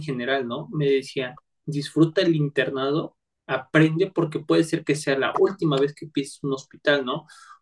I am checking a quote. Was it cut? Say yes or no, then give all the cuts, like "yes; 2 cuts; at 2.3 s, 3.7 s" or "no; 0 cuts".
no; 0 cuts